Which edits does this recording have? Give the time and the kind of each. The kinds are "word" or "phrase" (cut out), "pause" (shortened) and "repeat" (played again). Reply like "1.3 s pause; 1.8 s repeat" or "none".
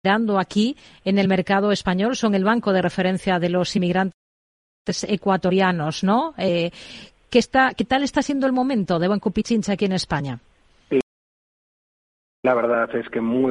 none